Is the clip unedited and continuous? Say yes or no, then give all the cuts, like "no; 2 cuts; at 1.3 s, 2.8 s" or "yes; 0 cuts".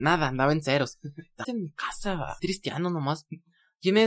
no; 2 cuts; at 1.4 s, 2.4 s